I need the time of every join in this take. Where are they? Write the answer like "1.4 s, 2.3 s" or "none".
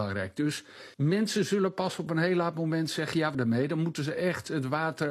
0.9 s, 3.3 s